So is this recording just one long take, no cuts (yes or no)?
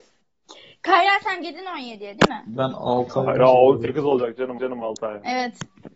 no